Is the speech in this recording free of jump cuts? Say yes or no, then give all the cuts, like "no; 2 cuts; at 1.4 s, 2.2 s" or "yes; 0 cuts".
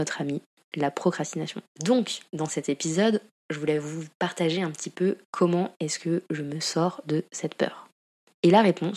no; 2 cuts; at 1.7 s, 5.2 s